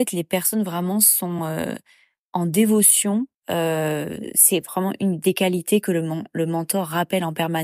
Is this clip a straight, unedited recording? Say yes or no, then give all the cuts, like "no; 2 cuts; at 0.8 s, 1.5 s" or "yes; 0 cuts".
yes; 0 cuts